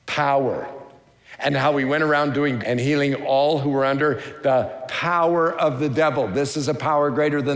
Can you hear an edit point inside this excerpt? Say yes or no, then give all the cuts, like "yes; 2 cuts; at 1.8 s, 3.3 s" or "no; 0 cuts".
yes; 1 cut; at 2.6 s